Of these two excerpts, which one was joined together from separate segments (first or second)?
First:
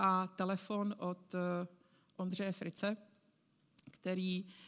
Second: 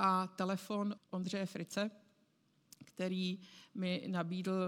second